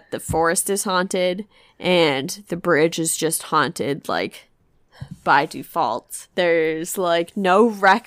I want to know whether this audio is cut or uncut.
cut